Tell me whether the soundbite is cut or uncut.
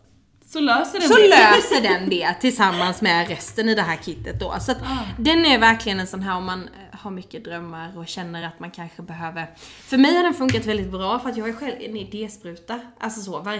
uncut